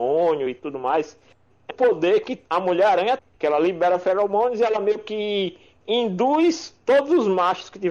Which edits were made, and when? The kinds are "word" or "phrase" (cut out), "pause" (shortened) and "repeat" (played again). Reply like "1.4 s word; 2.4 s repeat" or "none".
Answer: 1.7 s word; 2.4 s pause; 3.2 s word